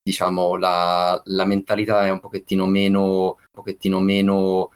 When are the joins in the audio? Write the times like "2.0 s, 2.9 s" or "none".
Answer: 3.5 s

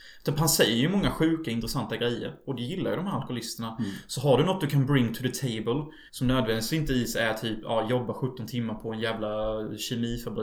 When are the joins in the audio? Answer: 6.1 s

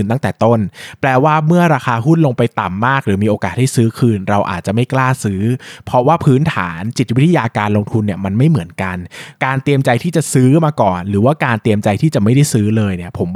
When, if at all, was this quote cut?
9.4 s

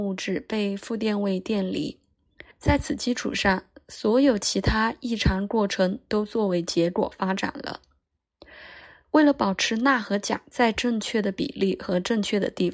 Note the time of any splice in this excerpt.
2.5 s

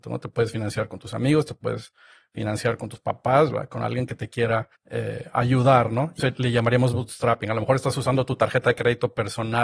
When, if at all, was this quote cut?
4.8 s, 6.2 s

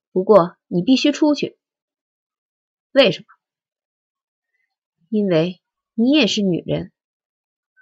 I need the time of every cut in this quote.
none

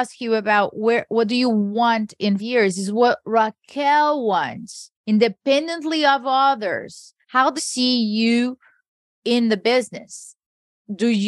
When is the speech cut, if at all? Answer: 2.4 s, 4.9 s, 7.2 s, 7.6 s, 8.9 s

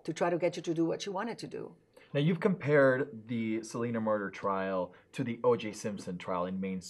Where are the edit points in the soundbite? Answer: none

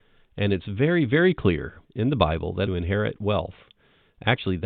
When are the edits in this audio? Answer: 1.8 s, 2.7 s

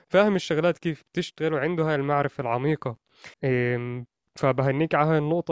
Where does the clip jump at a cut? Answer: 3.3 s

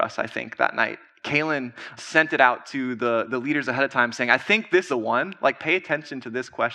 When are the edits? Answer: 2.0 s, 4.9 s

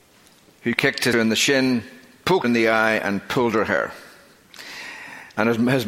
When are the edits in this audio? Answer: 1.1 s, 2.4 s

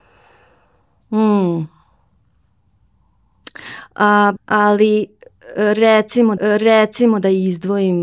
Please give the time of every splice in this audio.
4.4 s, 6.4 s

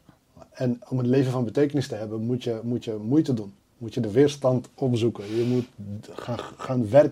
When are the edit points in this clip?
3.6 s

